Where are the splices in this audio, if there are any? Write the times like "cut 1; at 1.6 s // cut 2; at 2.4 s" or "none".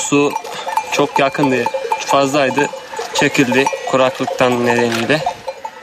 none